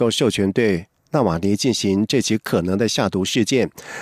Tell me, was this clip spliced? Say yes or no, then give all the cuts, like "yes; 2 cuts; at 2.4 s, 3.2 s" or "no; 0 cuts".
no; 0 cuts